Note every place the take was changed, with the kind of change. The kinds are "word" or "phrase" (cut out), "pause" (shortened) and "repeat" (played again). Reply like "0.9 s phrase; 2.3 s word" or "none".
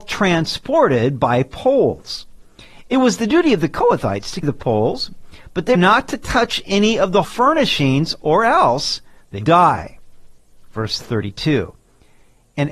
4.4 s word; 5.7 s word; 7.2 s word; 9.4 s word